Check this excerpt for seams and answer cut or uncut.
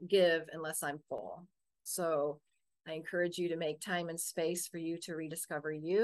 uncut